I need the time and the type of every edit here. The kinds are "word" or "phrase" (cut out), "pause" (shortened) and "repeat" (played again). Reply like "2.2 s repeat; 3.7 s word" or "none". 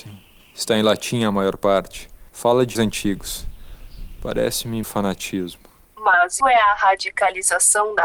2.3 s pause; 2.8 s word; 4.8 s word; 6.4 s word